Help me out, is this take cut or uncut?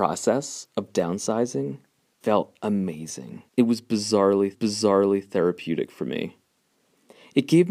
cut